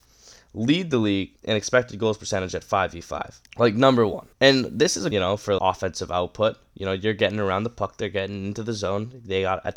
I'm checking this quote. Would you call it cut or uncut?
cut